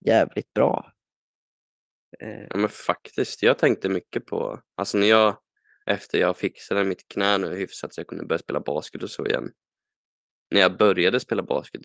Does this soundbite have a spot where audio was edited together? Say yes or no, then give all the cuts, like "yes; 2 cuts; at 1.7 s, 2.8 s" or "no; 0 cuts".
no; 0 cuts